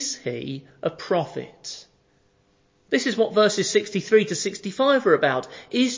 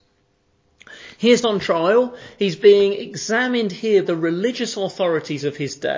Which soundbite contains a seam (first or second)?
second